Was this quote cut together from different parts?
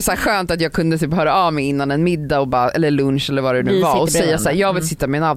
no; 0 cuts

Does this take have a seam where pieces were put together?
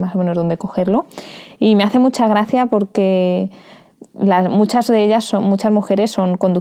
no; 0 cuts

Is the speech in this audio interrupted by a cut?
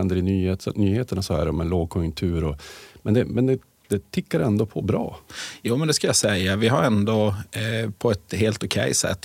no; 0 cuts

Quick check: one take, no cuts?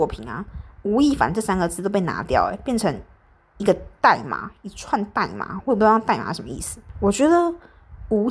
yes; 0 cuts

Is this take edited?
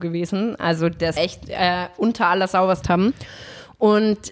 yes; 2 cuts; at 1.2 s, 2.8 s

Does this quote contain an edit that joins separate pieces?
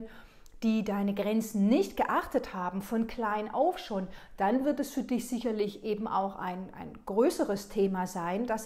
no; 0 cuts

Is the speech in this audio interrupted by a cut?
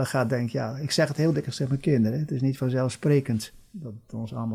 no; 0 cuts

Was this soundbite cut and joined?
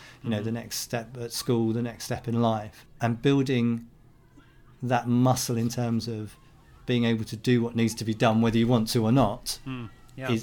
no; 0 cuts

